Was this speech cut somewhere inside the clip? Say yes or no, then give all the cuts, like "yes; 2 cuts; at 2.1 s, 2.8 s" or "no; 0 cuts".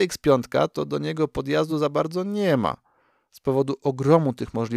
no; 0 cuts